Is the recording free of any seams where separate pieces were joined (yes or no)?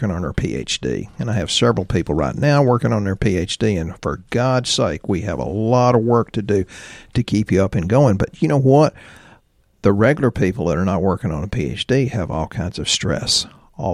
yes